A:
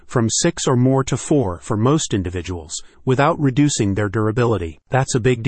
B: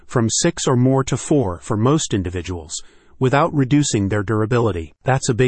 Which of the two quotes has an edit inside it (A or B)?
A